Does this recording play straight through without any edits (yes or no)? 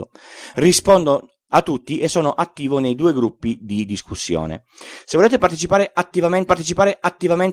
no